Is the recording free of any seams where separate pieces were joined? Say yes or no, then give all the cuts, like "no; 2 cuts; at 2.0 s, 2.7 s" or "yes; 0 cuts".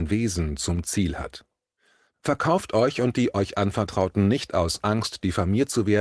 yes; 0 cuts